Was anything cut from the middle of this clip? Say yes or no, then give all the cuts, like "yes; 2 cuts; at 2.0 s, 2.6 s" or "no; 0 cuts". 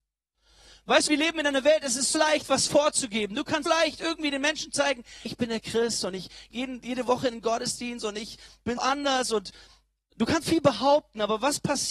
yes; 7 cuts; at 1.1 s, 2.1 s, 3.7 s, 5.3 s, 6.5 s, 8.8 s, 10.4 s